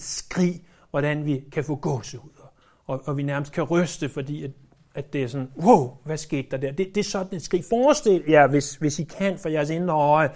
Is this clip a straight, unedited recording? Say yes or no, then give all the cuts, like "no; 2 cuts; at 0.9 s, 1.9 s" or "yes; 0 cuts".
yes; 0 cuts